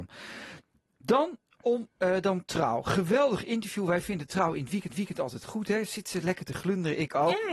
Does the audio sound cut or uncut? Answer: cut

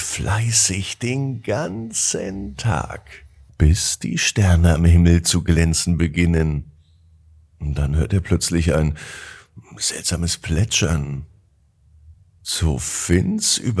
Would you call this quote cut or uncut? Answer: uncut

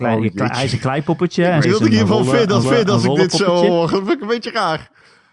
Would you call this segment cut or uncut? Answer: cut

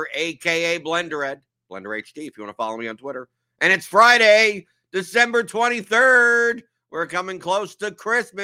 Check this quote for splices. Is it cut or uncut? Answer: uncut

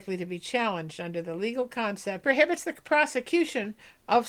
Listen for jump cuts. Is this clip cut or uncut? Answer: cut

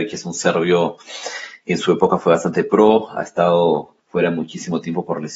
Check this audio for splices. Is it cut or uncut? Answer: cut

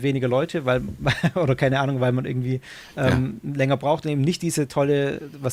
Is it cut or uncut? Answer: uncut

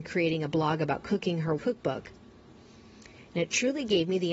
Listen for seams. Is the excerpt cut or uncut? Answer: cut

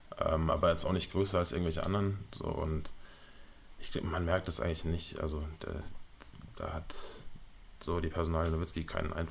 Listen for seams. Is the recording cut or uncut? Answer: uncut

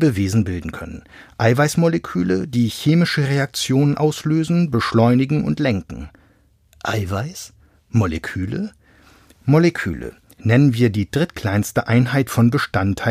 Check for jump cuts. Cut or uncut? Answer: uncut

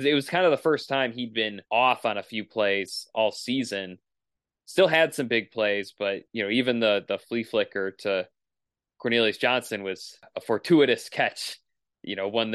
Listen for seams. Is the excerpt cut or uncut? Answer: cut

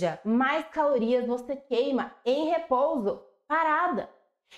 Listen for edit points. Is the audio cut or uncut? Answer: uncut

